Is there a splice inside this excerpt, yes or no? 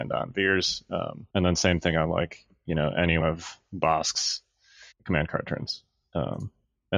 yes